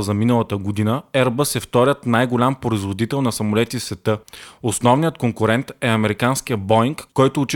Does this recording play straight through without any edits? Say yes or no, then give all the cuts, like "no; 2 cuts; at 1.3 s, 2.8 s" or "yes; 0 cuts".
yes; 0 cuts